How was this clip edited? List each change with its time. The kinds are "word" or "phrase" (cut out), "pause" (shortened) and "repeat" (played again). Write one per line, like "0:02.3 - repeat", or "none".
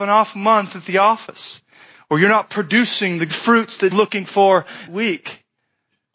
0:03.3 - word
0:03.9 - word
0:04.9 - word